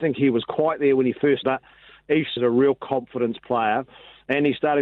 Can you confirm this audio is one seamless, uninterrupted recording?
no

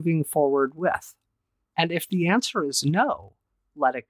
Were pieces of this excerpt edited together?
no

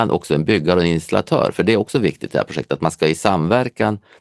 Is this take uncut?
yes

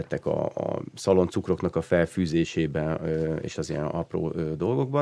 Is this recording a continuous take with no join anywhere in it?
yes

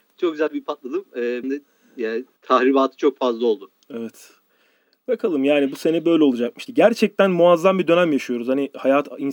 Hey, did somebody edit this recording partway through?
yes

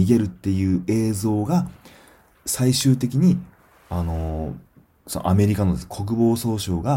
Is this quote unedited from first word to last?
yes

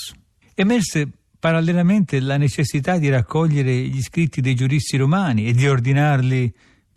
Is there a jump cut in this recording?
no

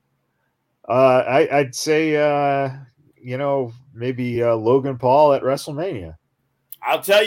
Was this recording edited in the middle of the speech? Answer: no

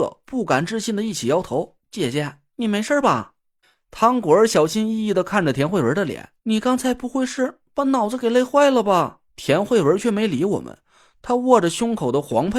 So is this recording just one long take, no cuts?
no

